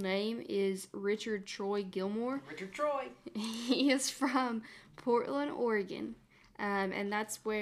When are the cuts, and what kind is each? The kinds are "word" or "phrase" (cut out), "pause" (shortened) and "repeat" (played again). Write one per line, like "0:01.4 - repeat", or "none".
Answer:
none